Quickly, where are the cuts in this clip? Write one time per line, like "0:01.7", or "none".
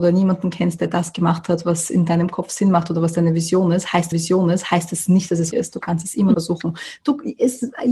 0:04.1
0:05.5
0:06.3